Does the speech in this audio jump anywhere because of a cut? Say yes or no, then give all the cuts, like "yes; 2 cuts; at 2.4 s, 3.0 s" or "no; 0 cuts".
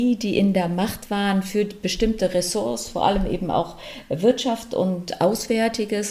no; 0 cuts